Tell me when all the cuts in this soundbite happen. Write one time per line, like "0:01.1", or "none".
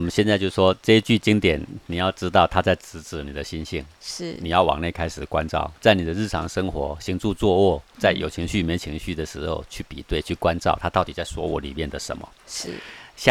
0:05.8
0:07.9